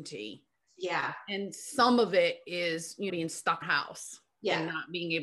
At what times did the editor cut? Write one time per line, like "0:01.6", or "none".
0:03.1
0:03.6